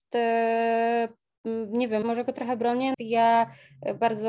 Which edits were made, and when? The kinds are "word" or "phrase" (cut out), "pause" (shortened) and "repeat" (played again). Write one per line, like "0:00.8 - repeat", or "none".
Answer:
0:02.0 - word
0:02.9 - word